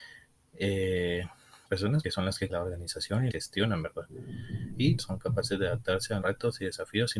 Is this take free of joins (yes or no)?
no